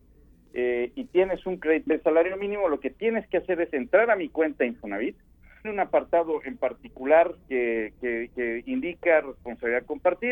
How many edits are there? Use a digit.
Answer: 4